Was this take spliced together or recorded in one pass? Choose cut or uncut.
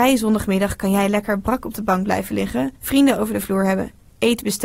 cut